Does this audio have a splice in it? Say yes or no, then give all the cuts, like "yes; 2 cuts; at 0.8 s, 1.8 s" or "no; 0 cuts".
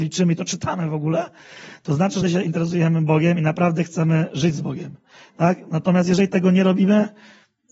yes; 1 cut; at 2.2 s